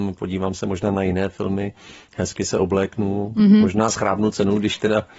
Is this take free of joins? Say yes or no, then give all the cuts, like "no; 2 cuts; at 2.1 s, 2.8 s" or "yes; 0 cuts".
yes; 0 cuts